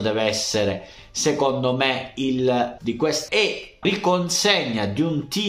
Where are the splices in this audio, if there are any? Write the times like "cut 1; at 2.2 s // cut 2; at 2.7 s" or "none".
cut 1; at 2.8 s // cut 2; at 3.3 s // cut 3; at 3.8 s